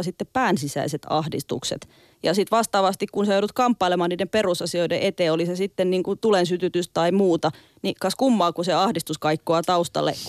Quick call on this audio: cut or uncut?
uncut